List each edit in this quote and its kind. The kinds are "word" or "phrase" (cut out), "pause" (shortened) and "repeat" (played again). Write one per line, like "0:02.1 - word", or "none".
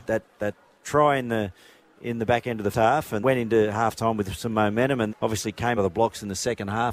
0:02.7 - word
0:03.2 - word
0:05.1 - word
0:05.8 - word